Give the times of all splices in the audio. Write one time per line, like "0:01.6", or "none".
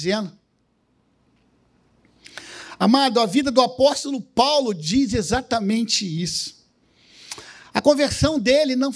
none